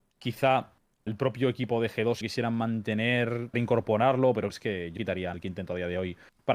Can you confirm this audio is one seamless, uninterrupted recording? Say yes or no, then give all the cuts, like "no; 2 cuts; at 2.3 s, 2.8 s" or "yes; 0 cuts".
no; 6 cuts; at 1.1 s, 2.2 s, 3.5 s, 4.5 s, 5.0 s, 5.3 s